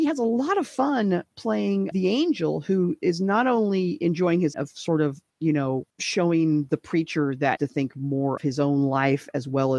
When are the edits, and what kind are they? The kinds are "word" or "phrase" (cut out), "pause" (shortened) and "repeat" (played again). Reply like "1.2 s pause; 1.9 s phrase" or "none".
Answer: 1.9 s word; 4.5 s word; 5.3 s pause; 5.9 s pause; 7.6 s phrase; 8.4 s word